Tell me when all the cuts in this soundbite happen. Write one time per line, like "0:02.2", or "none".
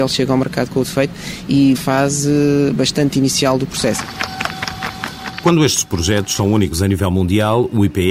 0:01.7